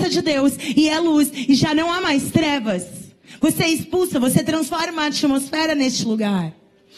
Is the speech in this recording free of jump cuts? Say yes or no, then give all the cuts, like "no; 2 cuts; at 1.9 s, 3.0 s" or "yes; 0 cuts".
yes; 0 cuts